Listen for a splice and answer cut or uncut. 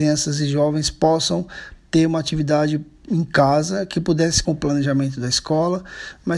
cut